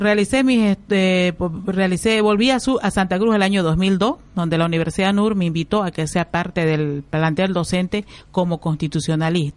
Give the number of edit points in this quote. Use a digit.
0